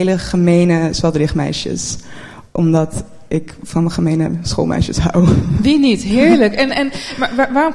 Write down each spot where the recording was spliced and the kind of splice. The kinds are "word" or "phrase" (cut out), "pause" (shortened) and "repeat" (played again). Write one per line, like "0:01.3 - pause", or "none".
none